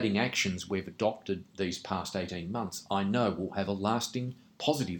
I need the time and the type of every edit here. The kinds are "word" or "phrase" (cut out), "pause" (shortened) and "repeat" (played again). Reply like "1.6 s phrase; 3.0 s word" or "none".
none